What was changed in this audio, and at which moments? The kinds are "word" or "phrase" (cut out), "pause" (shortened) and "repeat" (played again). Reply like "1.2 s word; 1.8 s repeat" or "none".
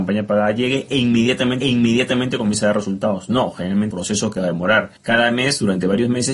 1.6 s repeat; 3.9 s phrase; 5.0 s pause

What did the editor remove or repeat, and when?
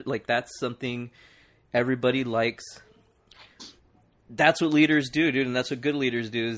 none

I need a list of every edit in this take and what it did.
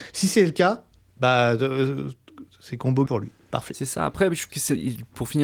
3.1 s word; 4.5 s word

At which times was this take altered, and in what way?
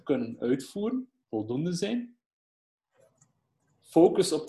1.2 s pause

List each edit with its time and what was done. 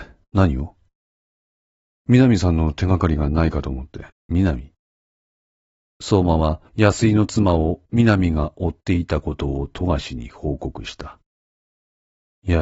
4.1 s pause; 6.7 s pause

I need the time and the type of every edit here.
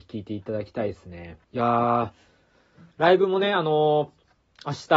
1.4 s pause; 2.9 s pause

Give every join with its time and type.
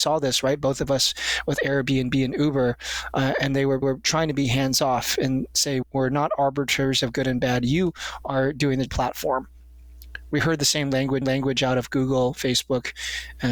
3.8 s repeat; 5.8 s word; 8.9 s phrase; 11.2 s repeat

